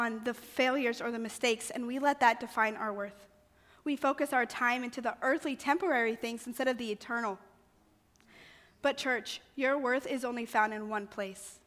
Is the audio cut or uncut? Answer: uncut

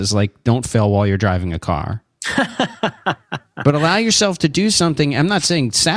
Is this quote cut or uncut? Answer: uncut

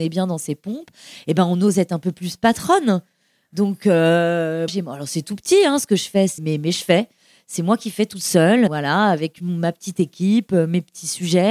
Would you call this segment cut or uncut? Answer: cut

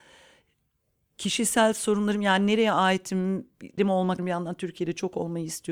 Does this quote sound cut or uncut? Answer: cut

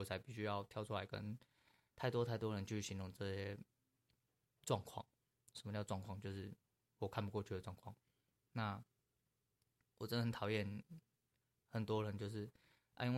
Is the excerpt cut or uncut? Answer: uncut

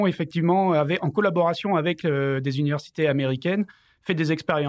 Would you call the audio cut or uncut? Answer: uncut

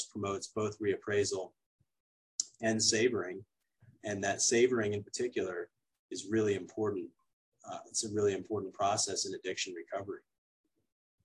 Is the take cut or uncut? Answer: uncut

